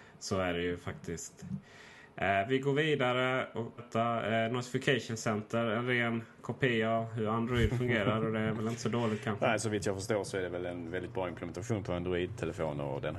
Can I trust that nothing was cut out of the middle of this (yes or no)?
no